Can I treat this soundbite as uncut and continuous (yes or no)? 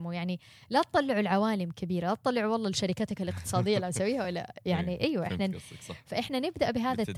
yes